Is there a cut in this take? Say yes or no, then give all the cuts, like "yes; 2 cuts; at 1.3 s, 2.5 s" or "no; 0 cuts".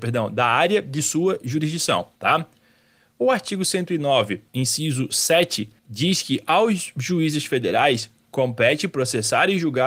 yes; 3 cuts; at 2.2 s, 4.5 s, 5.8 s